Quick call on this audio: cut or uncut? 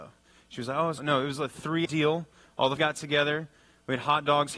cut